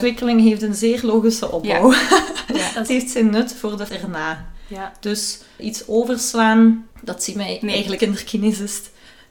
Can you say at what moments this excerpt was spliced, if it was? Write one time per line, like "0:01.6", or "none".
0:02.9
0:03.9
0:05.6
0:06.9
0:08.0